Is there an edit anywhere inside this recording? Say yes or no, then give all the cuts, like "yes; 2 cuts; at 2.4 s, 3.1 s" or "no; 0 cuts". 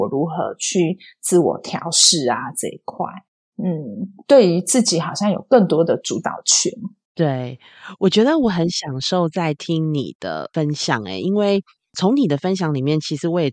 no; 0 cuts